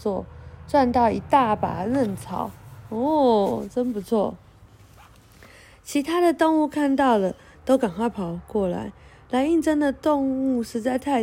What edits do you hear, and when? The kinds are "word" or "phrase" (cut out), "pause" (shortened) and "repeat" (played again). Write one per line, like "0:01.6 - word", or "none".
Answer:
none